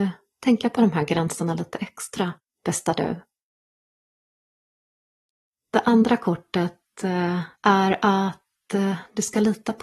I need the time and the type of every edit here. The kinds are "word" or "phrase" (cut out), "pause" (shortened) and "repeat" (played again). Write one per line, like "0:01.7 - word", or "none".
0:02.4 - pause
0:07.6 - pause